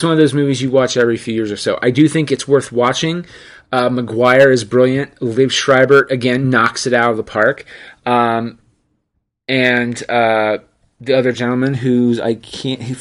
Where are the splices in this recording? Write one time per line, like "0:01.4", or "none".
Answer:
none